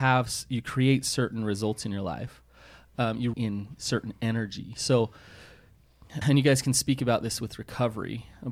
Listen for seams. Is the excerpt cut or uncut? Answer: cut